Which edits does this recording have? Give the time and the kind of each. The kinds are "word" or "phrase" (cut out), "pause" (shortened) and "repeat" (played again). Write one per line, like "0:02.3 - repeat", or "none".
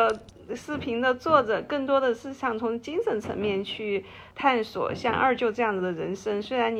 0:04.3 - pause